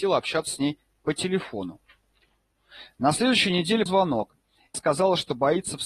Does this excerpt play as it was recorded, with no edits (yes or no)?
no